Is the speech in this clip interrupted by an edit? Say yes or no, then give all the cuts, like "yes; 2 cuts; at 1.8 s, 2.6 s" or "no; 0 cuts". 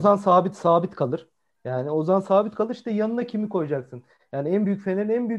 no; 0 cuts